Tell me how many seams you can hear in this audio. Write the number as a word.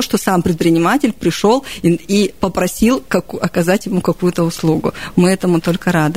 zero